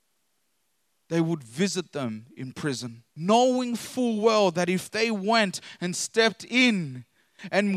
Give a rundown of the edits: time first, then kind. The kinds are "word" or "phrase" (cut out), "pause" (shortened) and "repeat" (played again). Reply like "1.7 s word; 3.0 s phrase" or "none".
3.1 s pause